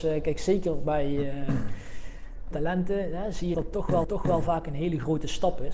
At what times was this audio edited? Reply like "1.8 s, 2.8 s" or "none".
2.5 s, 3.5 s, 4.0 s